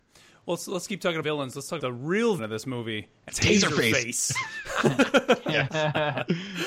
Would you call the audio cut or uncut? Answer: cut